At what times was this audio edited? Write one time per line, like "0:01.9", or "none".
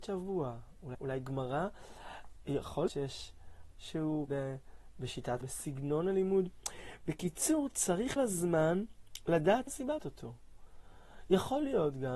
0:00.9
0:02.9
0:03.7
0:04.3
0:05.4
0:08.2
0:09.7
0:10.0